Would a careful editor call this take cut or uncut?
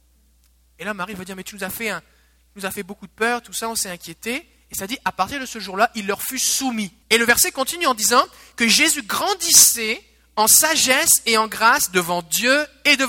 cut